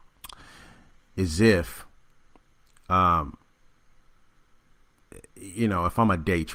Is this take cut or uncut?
uncut